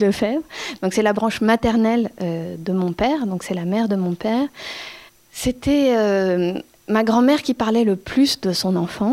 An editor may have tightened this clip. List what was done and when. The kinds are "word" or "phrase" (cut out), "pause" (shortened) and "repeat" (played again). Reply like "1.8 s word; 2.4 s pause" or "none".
5.1 s pause